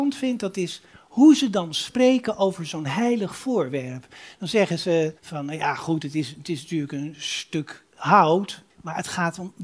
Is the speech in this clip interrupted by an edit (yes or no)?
yes